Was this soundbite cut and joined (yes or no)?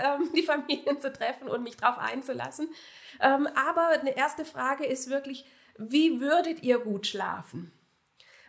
no